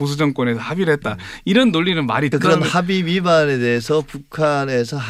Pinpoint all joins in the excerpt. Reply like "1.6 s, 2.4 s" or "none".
2.3 s